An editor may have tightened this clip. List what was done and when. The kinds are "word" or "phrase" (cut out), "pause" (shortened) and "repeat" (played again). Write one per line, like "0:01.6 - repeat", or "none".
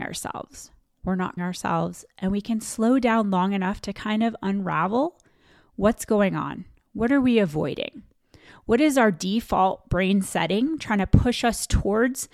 0:01.4 - word